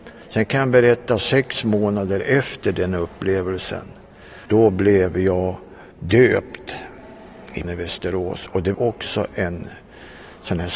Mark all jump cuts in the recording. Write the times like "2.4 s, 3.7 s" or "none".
4.5 s, 5.9 s, 7.6 s, 8.7 s